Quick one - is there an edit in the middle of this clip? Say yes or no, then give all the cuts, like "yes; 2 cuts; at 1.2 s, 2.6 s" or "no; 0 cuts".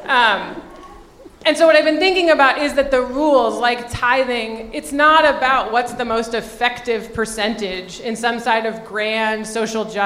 no; 0 cuts